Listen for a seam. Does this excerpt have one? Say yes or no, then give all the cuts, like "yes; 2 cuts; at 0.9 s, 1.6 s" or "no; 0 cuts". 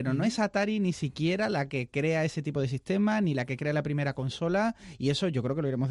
no; 0 cuts